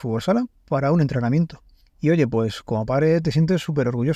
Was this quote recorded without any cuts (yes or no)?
no